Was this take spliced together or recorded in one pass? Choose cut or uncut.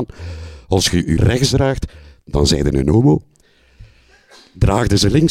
cut